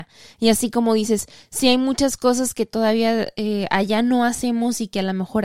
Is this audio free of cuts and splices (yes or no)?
yes